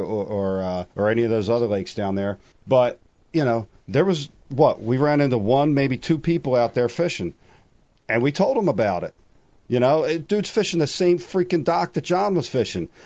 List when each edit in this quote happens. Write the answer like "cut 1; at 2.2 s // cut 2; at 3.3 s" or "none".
cut 1; at 0.9 s // cut 2; at 2.5 s